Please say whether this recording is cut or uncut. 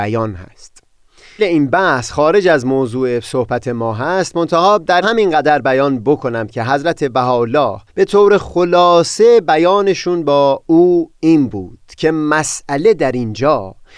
cut